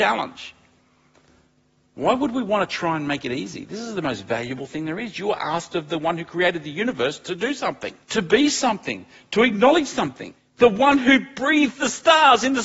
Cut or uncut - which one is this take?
cut